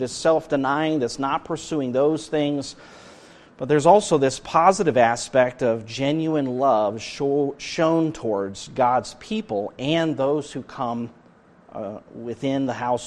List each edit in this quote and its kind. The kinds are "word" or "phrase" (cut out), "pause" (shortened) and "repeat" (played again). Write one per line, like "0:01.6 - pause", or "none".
none